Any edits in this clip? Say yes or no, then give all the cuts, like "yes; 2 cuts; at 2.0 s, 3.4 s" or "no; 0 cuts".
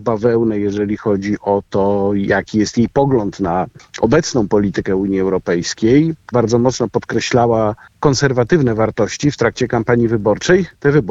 yes; 1 cut; at 6.3 s